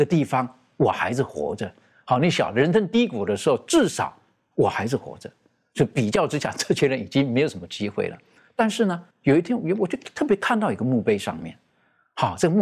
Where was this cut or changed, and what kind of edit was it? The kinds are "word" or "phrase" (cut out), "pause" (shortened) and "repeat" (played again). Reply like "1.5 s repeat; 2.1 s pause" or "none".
9.1 s pause